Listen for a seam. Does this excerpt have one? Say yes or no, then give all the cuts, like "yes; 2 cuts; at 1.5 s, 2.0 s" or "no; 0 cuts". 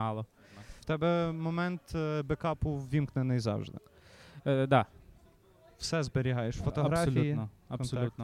no; 0 cuts